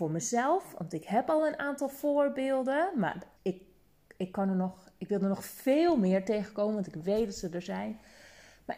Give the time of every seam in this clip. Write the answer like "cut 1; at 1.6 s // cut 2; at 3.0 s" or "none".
cut 1; at 3.4 s